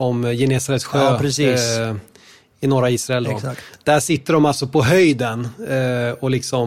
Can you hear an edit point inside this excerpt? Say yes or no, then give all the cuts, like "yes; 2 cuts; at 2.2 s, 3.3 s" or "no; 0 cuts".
no; 0 cuts